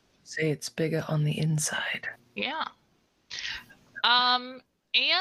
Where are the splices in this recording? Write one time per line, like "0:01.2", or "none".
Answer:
0:02.2